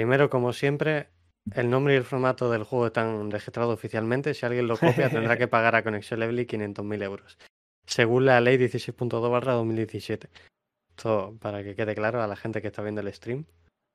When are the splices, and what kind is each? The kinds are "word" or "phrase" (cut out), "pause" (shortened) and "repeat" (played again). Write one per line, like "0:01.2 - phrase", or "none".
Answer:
none

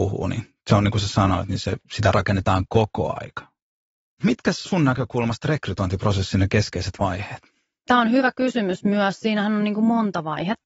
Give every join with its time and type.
0:04.6 - word

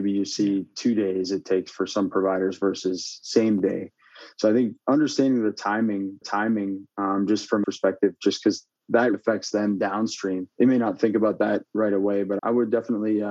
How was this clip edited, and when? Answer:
0:06.2 - repeat
0:07.6 - phrase
0:09.1 - word
0:10.5 - pause
0:11.7 - pause
0:12.4 - word

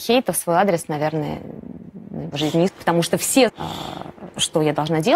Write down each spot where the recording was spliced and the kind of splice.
0:02.3 - word
0:02.7 - word
0:03.5 - word

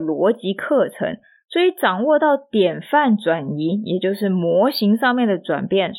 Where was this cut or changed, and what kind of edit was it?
none

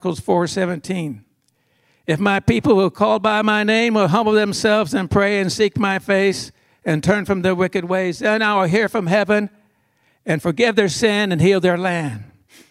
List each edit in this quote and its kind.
none

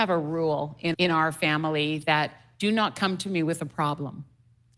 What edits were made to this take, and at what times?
0:00.9 - word

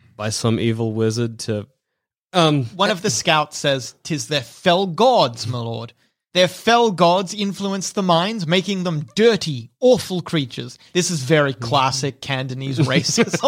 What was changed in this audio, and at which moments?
none

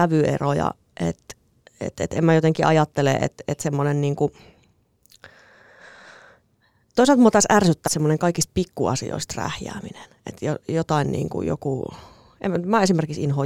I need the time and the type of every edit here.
0:07.9 - word

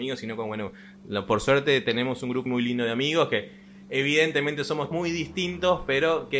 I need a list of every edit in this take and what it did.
0:02.5 - word
0:04.9 - word

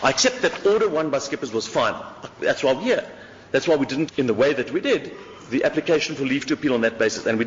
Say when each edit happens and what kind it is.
0:04.1 - word

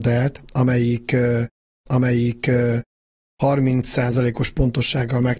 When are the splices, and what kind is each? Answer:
0:01.9 - repeat

